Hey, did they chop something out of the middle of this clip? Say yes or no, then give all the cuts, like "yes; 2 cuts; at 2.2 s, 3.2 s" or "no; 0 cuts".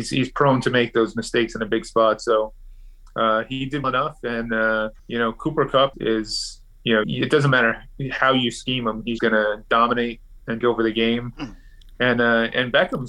yes; 6 cuts; at 3.8 s, 5.0 s, 5.9 s, 7.0 s, 9.2 s, 10.6 s